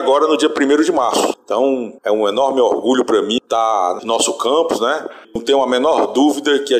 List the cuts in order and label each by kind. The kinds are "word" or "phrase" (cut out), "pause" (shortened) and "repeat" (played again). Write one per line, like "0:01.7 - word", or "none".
0:02.0 - pause
0:04.0 - phrase
0:05.2 - pause